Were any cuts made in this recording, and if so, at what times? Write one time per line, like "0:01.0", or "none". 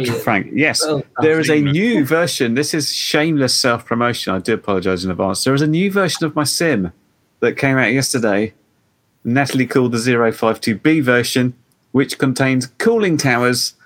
none